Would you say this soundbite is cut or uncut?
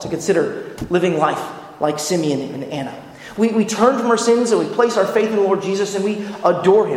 uncut